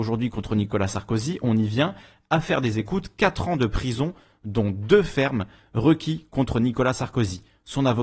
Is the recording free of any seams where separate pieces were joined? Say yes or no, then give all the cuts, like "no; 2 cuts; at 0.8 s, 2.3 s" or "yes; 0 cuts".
yes; 0 cuts